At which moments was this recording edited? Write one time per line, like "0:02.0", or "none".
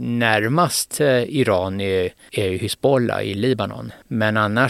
none